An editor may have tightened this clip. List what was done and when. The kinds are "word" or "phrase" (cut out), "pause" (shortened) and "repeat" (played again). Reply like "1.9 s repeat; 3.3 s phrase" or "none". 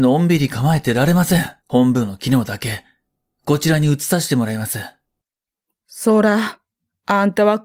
1.6 s pause